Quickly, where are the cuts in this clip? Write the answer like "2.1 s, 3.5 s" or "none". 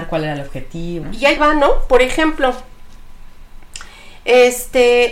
1.0 s, 1.4 s